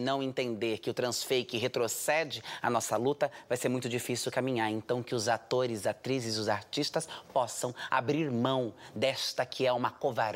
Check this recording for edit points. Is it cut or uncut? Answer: uncut